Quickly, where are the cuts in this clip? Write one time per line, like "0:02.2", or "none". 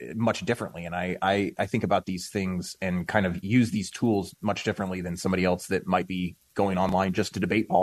none